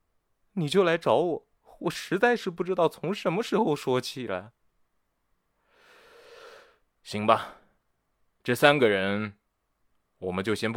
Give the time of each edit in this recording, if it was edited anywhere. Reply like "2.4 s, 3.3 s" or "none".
none